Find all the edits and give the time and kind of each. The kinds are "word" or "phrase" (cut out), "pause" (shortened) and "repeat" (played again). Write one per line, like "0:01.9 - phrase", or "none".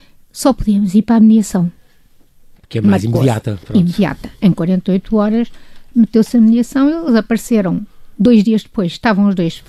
none